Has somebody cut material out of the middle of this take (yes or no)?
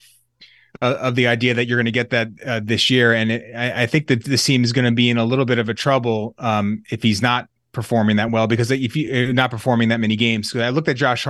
no